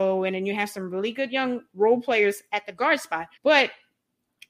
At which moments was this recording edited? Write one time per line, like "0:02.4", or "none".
0:03.4